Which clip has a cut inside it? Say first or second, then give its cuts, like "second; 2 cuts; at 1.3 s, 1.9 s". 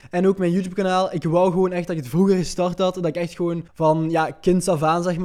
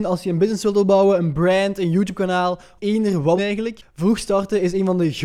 second; 2 cuts; at 2.8 s, 3.4 s